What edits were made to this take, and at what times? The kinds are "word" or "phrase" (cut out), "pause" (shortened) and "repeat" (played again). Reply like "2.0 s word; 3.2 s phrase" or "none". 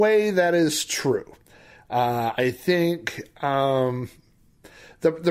none